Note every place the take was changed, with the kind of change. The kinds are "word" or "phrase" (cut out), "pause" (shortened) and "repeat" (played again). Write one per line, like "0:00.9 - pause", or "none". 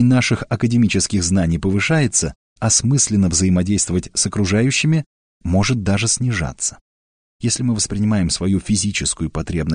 0:02.6 - word